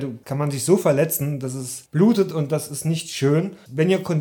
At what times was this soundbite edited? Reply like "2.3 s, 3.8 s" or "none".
none